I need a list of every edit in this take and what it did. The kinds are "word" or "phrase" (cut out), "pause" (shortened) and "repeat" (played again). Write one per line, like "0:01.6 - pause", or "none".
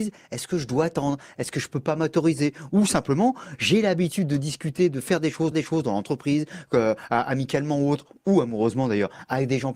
0:05.5 - repeat

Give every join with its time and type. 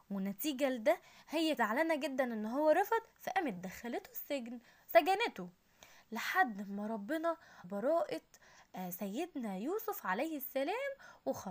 0:01.6 - word
0:07.6 - word

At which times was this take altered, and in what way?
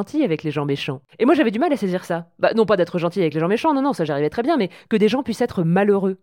0:01.1 - pause

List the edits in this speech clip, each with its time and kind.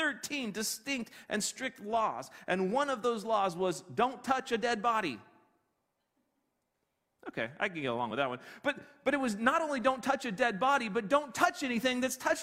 none

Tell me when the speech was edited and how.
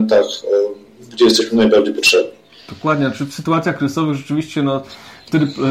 none

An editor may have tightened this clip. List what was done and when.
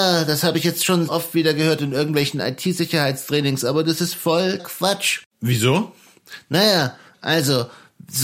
0:01.1 - word
0:04.6 - word
0:05.3 - pause

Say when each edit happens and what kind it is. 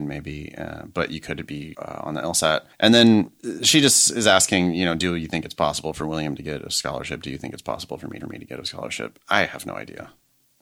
0:01.7 - word
0:02.7 - pause
0:08.2 - repeat

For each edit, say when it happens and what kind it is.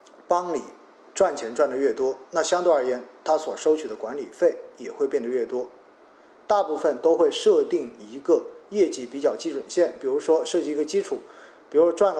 0:02.3 - pause

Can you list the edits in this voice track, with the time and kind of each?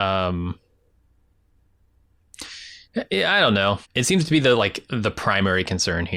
0:03.8 - pause

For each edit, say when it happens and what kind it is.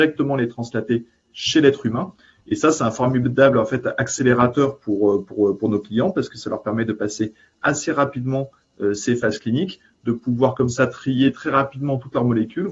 none

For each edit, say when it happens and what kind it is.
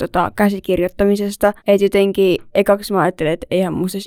0:01.6 - pause

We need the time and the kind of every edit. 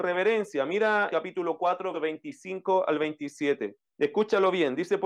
0:01.1 - word
0:01.9 - word
0:03.9 - pause

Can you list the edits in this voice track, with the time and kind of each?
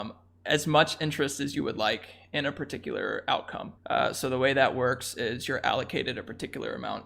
0:03.8 - pause

